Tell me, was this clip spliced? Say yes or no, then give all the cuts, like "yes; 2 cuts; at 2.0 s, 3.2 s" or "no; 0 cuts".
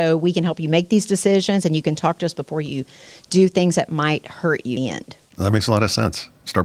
yes; 2 cuts; at 4.8 s, 5.3 s